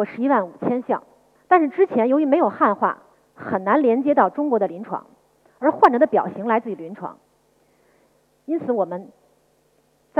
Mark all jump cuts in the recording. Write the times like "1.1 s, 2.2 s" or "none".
3.1 s

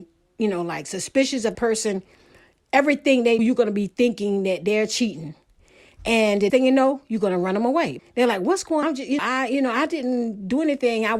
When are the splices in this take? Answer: 1.5 s, 3.4 s, 6.5 s, 8.0 s, 8.8 s, 9.2 s

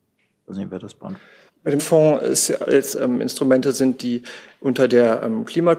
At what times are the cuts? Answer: 1.5 s, 1.8 s, 2.9 s

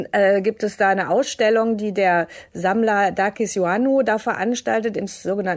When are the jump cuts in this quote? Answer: none

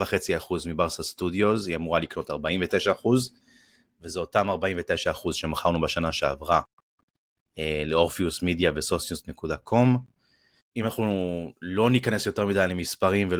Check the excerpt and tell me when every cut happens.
none

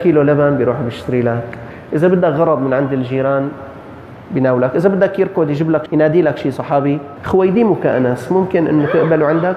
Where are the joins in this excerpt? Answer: 5.9 s, 7.2 s

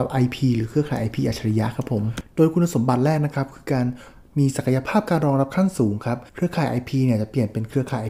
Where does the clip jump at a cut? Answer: 6.3 s

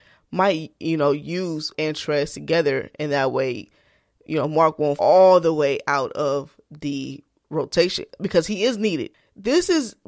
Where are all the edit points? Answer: 1.7 s, 5.0 s

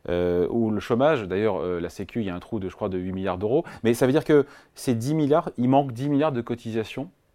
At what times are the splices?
none

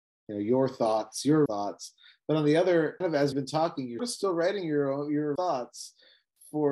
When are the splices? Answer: 1.5 s, 3.0 s, 3.3 s, 4.0 s, 5.4 s

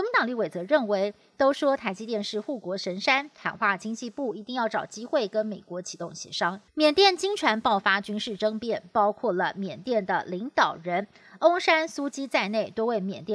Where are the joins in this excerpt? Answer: 6.7 s

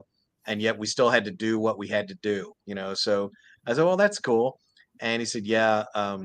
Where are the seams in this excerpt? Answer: none

